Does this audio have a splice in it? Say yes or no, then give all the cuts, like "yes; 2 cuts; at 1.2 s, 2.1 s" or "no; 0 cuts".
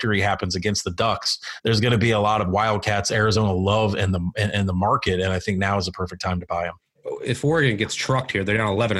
no; 0 cuts